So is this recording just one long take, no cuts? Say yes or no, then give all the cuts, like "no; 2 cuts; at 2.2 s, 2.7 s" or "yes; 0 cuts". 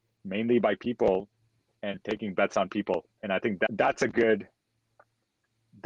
yes; 0 cuts